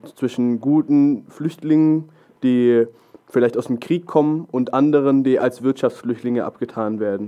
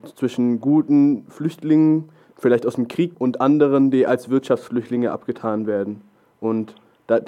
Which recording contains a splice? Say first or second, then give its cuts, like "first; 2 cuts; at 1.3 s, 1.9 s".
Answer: second; 2 cuts; at 2.3 s, 3.1 s